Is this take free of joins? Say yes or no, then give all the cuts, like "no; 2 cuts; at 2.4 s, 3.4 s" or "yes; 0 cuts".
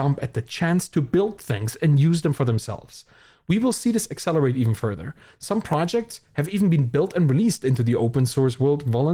yes; 0 cuts